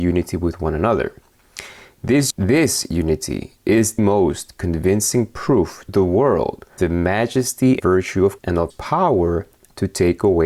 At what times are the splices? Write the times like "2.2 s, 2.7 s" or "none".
2.3 s, 4.0 s, 5.9 s, 6.8 s, 7.8 s, 8.4 s, 8.7 s